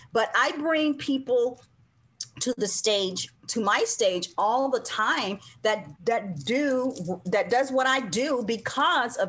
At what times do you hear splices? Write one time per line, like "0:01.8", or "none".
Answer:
0:03.4
0:06.0